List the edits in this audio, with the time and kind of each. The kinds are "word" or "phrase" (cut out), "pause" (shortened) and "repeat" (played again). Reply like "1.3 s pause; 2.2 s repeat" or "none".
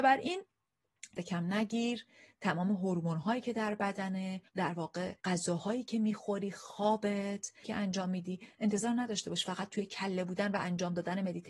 1.2 s phrase; 4.5 s pause; 5.2 s pause; 7.6 s word